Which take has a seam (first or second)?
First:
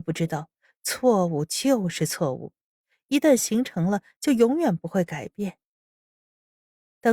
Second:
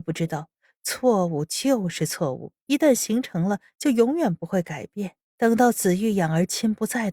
second